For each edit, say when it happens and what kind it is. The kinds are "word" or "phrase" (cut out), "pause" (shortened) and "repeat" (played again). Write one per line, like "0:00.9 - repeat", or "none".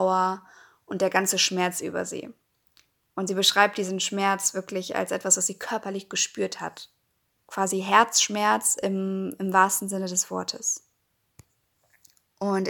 none